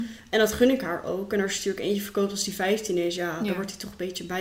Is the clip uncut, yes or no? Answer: yes